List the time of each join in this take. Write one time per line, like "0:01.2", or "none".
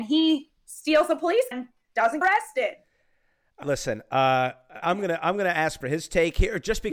0:01.5
0:02.2
0:03.6
0:04.8
0:05.8